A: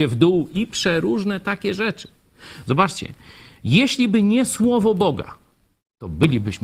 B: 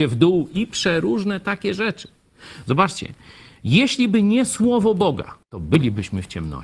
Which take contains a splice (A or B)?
B